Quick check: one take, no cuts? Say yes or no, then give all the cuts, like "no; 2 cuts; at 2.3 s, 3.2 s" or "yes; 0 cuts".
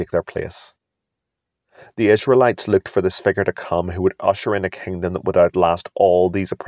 yes; 0 cuts